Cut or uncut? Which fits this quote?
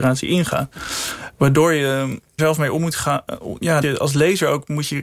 cut